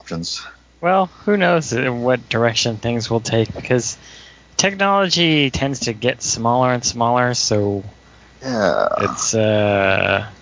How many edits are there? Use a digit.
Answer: 1